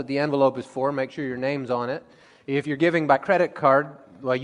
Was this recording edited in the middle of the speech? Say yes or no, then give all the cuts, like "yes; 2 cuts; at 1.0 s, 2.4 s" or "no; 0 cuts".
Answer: no; 0 cuts